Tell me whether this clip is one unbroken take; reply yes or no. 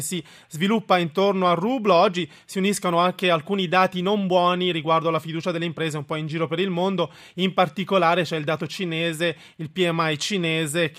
yes